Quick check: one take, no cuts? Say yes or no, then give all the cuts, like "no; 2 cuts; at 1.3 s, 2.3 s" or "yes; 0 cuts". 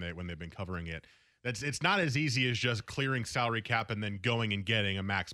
yes; 0 cuts